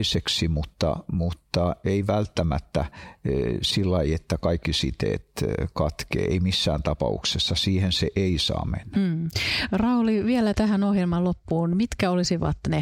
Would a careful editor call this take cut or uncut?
uncut